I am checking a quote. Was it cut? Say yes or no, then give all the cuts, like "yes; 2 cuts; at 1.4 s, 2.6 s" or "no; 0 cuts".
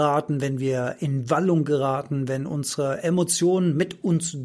no; 0 cuts